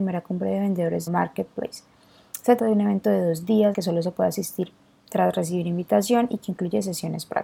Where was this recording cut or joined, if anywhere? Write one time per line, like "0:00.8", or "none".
0:01.1
0:02.6
0:03.7

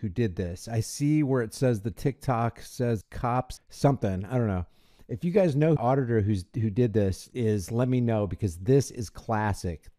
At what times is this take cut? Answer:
0:03.0
0:03.6
0:05.8

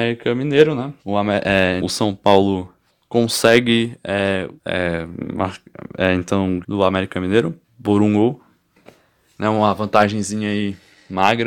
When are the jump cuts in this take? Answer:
0:01.0
0:01.8
0:02.9
0:04.6
0:06.6
0:07.6

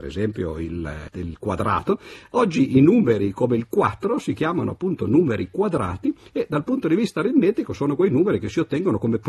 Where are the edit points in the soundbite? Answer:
0:01.1

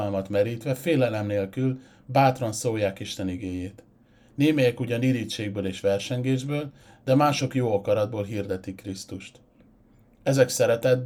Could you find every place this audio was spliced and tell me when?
none

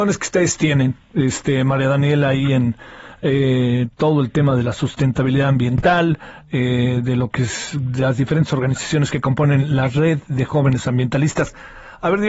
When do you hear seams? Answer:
0:01.0

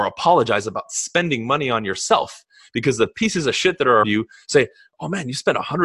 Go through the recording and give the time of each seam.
0:04.0

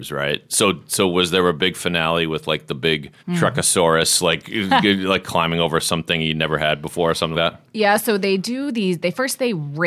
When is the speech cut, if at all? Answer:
0:03.2
0:07.3

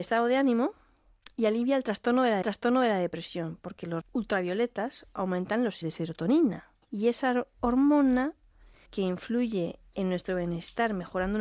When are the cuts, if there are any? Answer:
0:02.4
0:04.0
0:05.8
0:06.8
0:08.9

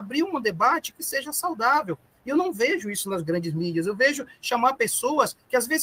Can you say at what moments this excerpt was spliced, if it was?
none

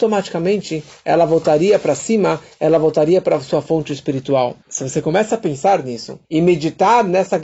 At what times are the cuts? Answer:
0:04.6
0:06.2

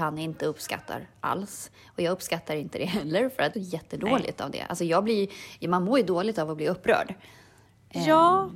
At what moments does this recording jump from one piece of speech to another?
0:03.5

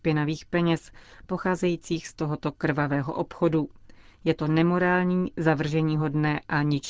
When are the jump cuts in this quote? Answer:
none

